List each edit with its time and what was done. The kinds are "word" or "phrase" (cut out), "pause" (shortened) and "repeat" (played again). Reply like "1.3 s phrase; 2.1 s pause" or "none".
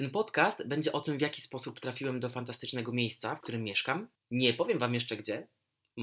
3.4 s phrase; 4.2 s pause